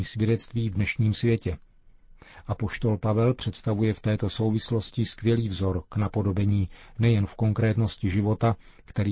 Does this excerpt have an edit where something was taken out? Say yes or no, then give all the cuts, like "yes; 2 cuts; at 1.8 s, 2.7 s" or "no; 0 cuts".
no; 0 cuts